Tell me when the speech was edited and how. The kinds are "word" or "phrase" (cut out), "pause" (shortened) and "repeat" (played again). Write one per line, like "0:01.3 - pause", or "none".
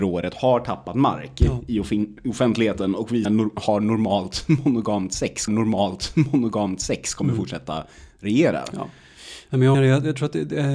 0:03.2 - word
0:05.5 - repeat
0:09.7 - phrase

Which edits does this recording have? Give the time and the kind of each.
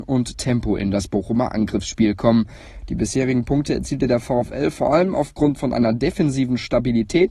none

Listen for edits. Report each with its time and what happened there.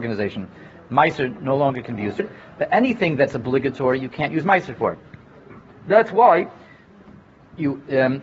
0:02.2 - word

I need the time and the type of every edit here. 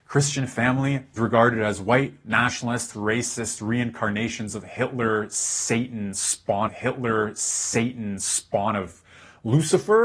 0:01.2 - word
0:02.9 - word
0:06.7 - repeat

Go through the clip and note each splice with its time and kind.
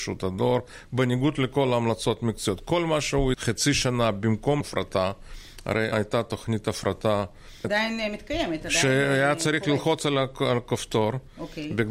0:03.3 - word
0:04.6 - word
0:05.9 - word
0:07.6 - word

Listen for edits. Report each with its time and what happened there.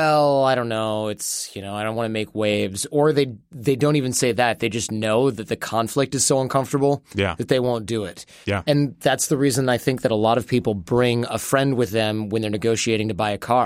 none

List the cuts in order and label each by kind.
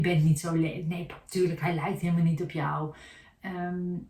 none

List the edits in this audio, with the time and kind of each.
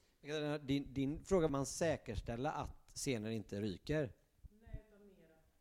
0:01.5 - phrase

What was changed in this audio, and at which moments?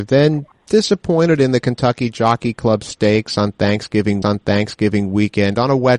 0:04.2 - repeat

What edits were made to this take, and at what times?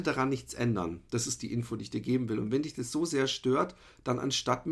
none

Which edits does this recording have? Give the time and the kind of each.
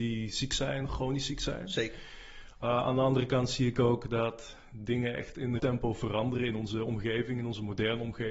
0:05.6 - word

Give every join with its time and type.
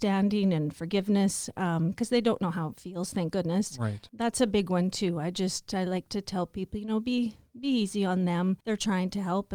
0:08.6 - pause

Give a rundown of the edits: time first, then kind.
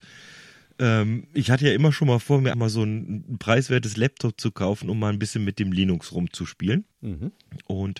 0:02.5 - word
0:06.9 - pause

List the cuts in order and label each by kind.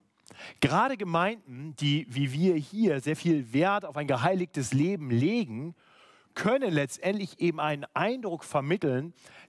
none

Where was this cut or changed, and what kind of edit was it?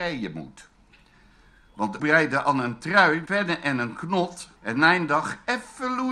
0:02.0 - word
0:03.3 - word
0:04.6 - pause

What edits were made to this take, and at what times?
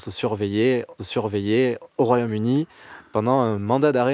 0:01.0 - repeat

